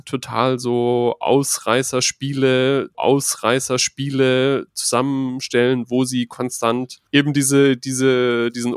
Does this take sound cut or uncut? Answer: cut